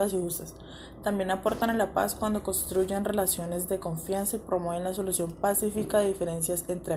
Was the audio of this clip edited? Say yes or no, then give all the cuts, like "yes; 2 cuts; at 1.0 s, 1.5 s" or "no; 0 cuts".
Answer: no; 0 cuts